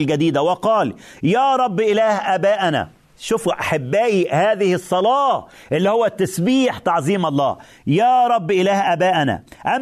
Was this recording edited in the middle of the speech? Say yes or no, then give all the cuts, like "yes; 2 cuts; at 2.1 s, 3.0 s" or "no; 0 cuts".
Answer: no; 0 cuts